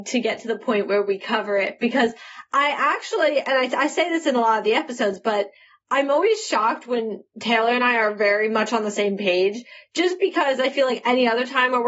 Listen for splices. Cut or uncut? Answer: uncut